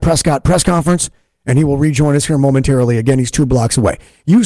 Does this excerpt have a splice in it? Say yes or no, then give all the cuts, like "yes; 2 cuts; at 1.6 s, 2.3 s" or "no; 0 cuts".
no; 0 cuts